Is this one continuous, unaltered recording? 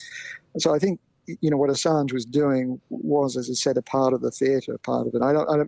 yes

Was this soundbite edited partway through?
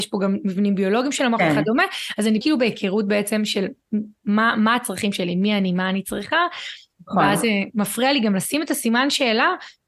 yes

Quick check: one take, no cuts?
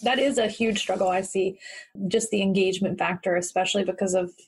yes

